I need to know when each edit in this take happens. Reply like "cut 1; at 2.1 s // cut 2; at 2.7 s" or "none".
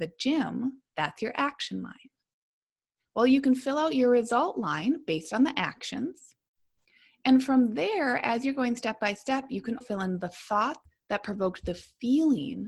cut 1; at 9.8 s